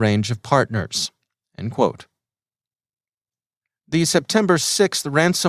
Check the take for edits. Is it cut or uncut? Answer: uncut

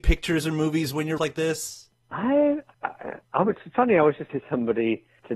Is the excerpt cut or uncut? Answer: cut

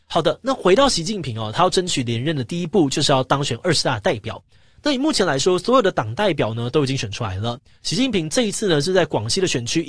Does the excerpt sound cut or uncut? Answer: uncut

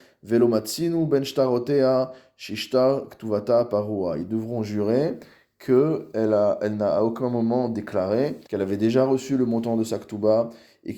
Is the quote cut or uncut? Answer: cut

